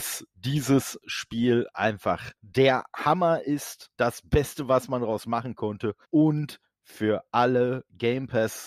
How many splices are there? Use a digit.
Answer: 3